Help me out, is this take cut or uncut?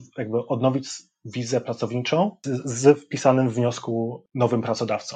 uncut